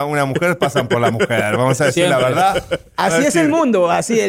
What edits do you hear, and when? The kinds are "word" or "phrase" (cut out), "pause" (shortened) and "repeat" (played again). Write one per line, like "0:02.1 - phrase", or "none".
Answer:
none